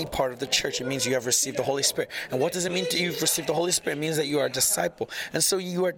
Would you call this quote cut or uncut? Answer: uncut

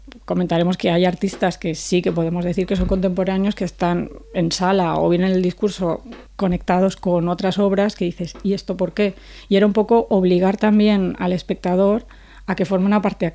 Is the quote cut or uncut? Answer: cut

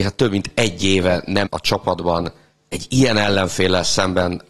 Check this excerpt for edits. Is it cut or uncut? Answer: cut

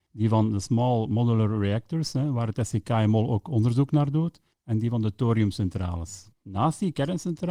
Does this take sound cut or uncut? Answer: cut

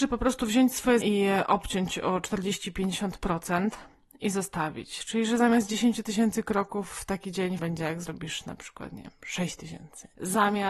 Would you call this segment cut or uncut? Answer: cut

